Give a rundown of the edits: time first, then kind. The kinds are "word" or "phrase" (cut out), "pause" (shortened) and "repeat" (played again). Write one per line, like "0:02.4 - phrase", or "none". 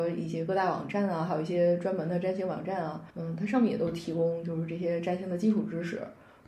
0:03.1 - pause